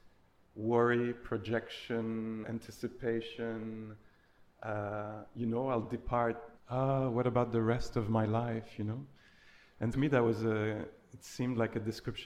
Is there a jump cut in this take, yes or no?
yes